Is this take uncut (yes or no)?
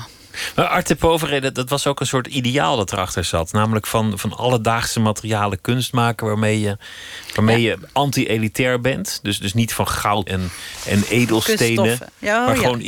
no